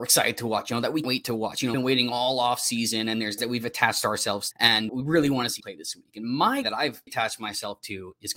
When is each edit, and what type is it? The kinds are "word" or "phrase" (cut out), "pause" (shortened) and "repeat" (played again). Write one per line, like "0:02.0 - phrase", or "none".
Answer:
0:01.0 - word
0:01.7 - word
0:03.4 - word
0:04.5 - word
0:04.9 - word
0:05.6 - word
0:06.6 - word
0:07.1 - word